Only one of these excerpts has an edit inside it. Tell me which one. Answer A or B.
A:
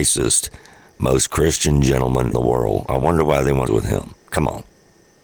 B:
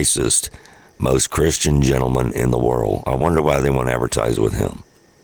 A